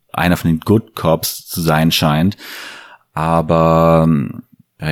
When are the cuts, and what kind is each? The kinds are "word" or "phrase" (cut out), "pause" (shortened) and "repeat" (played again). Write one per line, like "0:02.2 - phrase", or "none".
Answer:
none